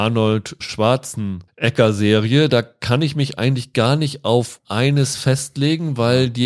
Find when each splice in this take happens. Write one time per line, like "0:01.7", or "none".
none